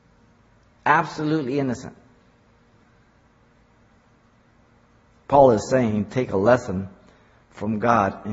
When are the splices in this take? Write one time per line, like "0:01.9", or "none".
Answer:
none